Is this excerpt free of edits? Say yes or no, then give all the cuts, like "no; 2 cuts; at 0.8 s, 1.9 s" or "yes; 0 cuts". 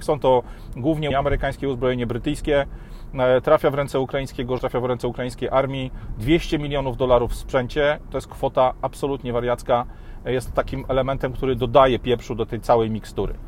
no; 2 cuts; at 1.1 s, 4.6 s